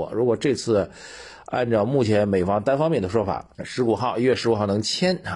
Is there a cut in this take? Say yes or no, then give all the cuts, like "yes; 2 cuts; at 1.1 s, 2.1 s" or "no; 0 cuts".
yes; 1 cut; at 3.5 s